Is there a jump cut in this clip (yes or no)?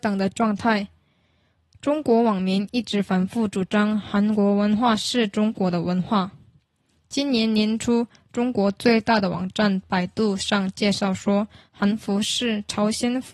no